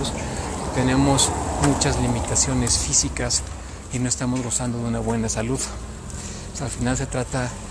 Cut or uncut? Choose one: uncut